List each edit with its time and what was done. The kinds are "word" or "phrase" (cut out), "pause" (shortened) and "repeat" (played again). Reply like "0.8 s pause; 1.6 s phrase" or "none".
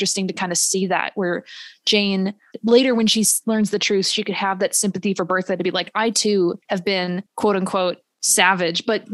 6.6 s pause; 7.3 s pause